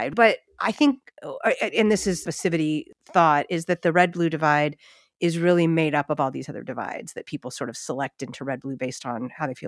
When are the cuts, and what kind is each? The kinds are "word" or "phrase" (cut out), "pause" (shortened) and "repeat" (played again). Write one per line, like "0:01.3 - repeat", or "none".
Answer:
none